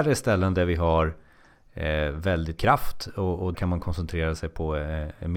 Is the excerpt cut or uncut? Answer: cut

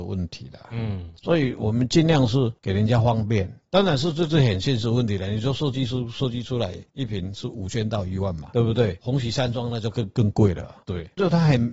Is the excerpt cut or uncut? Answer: cut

